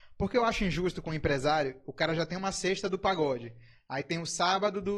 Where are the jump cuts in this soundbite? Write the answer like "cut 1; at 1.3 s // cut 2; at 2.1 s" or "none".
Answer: none